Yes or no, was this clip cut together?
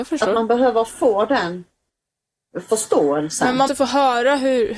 yes